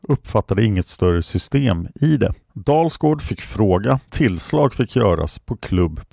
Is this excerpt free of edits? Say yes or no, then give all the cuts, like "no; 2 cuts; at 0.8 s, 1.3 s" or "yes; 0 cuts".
no; 2 cuts; at 2.4 s, 4.1 s